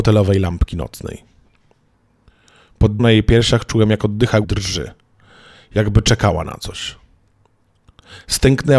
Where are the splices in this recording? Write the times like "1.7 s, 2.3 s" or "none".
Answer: 3.0 s, 4.4 s

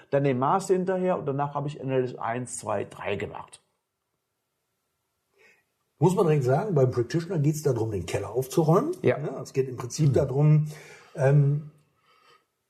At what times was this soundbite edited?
none

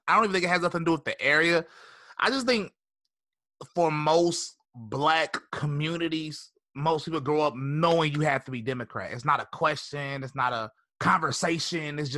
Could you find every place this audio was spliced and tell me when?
4.6 s, 10.8 s

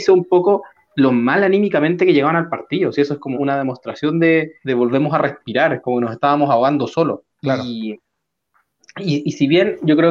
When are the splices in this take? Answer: 3.3 s, 4.6 s, 7.3 s

